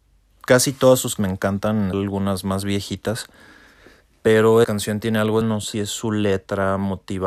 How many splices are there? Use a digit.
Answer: 5